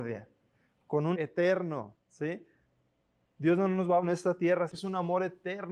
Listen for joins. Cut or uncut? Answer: cut